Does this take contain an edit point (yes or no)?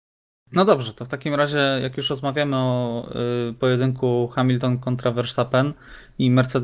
no